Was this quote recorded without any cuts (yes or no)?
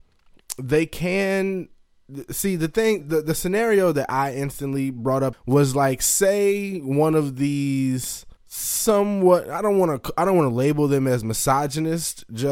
no